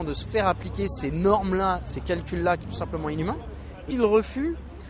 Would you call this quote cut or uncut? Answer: cut